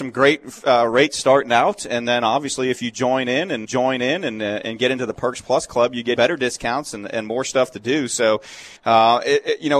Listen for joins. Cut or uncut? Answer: cut